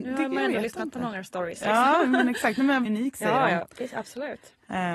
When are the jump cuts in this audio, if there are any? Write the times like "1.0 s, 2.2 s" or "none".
2.9 s